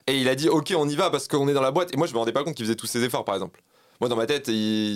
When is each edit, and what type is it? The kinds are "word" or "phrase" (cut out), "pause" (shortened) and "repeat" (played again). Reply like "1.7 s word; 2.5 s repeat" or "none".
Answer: none